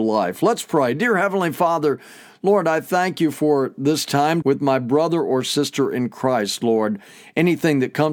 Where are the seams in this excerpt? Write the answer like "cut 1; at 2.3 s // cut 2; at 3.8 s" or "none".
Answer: cut 1; at 4.4 s